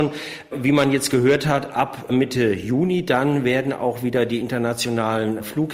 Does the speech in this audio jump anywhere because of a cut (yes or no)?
no